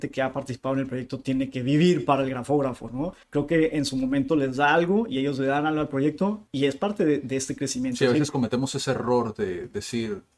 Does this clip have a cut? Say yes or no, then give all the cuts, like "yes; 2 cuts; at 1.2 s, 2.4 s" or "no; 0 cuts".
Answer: yes; 2 cuts; at 3.2 s, 6.5 s